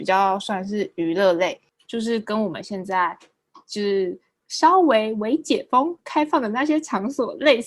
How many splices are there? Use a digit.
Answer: 0